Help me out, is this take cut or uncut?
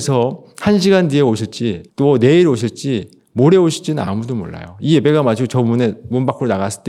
cut